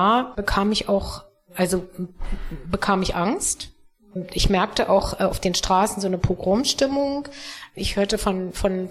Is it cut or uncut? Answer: uncut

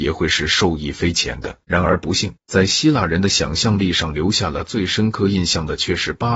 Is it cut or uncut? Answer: cut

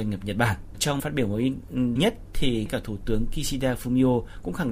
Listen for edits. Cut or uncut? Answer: cut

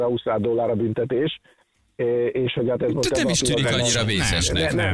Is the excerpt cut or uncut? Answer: uncut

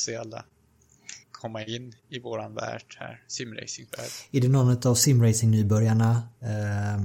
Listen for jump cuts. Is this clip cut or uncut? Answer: cut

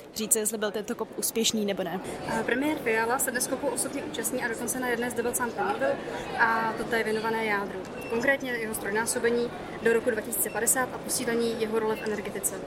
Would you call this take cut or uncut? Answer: cut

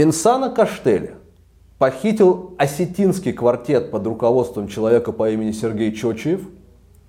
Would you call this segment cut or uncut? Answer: uncut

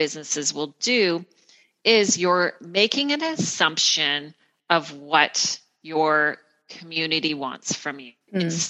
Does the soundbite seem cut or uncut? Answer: uncut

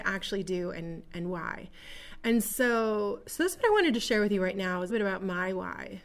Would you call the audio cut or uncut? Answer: cut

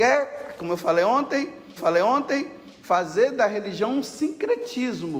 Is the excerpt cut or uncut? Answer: cut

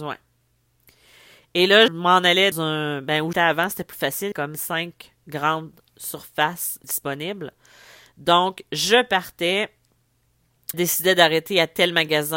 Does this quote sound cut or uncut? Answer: cut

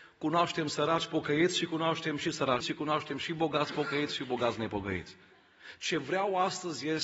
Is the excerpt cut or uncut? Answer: cut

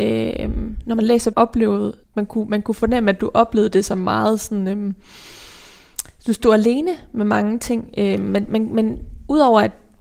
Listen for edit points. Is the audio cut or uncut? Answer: cut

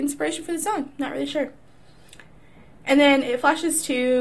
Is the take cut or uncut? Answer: uncut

